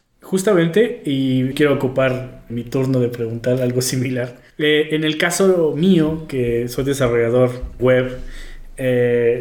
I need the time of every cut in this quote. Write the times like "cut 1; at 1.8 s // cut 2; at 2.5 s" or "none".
cut 1; at 1.5 s // cut 2; at 2.5 s // cut 3; at 4.5 s // cut 4; at 7.8 s